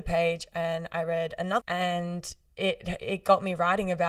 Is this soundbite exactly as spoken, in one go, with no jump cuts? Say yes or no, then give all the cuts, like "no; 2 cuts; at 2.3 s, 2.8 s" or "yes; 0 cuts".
no; 1 cut; at 1.6 s